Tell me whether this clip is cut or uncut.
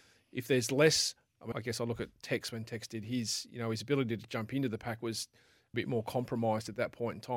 cut